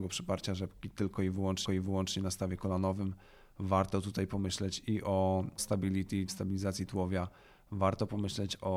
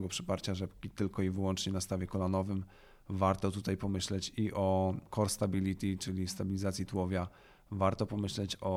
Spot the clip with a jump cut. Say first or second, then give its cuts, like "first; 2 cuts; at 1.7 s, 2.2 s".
first; 3 cuts; at 1.6 s, 5.6 s, 6.3 s